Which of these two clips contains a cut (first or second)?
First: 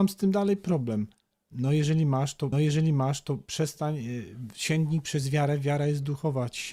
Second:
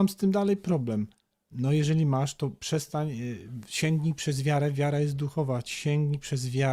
first